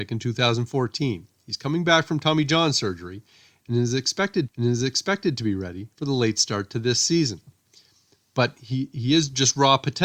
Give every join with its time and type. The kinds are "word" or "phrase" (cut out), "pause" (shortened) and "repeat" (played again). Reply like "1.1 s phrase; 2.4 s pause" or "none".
4.5 s repeat; 5.9 s pause